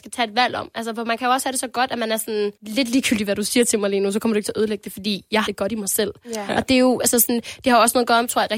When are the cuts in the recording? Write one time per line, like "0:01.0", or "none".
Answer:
0:02.6
0:05.5

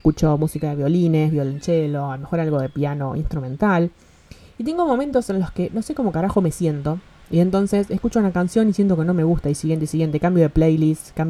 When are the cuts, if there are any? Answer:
none

